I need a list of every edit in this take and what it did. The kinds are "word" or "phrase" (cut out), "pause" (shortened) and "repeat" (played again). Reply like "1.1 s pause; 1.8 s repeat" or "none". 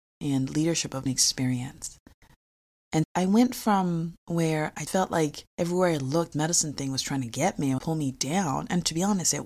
1.1 s phrase; 3.0 s word; 4.9 s word; 5.5 s pause; 6.3 s word; 7.8 s phrase